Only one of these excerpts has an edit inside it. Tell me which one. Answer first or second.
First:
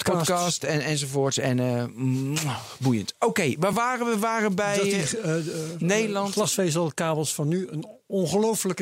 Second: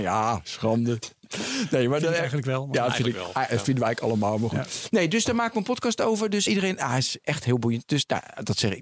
second